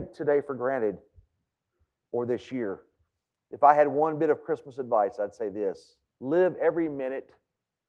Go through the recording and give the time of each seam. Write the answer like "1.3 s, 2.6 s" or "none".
6.1 s